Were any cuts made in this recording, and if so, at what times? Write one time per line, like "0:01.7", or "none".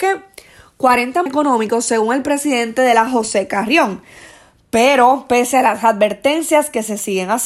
0:01.3
0:03.1